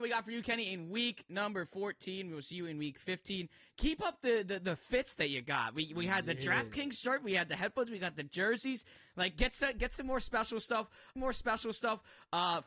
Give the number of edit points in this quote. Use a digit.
1